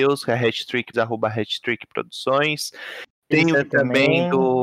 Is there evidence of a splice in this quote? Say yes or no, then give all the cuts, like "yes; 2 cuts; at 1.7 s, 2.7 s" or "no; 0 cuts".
yes; 2 cuts; at 0.9 s, 3.5 s